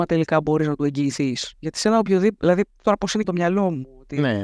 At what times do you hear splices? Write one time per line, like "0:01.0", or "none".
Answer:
0:01.5
0:02.8
0:03.2